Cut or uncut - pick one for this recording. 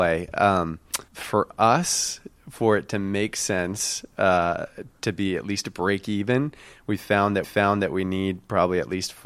cut